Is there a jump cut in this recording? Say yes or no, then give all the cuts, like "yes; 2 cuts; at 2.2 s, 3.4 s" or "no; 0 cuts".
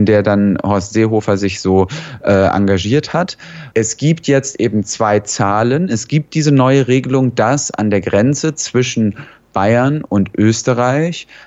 no; 0 cuts